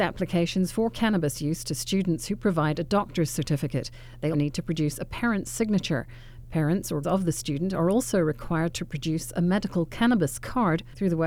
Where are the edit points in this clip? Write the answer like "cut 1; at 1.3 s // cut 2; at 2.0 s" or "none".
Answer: cut 1; at 4.3 s // cut 2; at 7.0 s